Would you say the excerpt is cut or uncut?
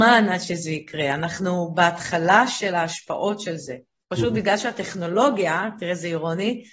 uncut